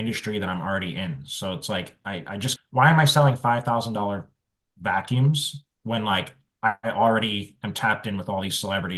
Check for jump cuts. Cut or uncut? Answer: cut